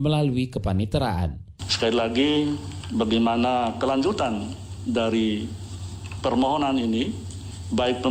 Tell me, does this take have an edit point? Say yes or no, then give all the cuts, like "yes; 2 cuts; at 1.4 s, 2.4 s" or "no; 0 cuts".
no; 0 cuts